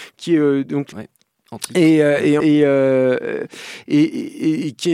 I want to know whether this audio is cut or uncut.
cut